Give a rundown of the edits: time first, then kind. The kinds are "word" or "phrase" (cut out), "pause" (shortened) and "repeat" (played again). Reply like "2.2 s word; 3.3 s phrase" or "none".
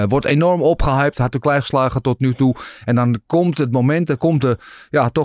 1.4 s phrase